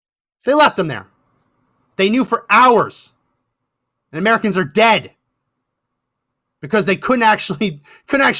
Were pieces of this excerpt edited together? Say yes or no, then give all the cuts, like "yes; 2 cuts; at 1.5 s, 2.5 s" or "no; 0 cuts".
no; 0 cuts